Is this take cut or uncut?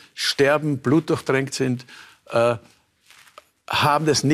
uncut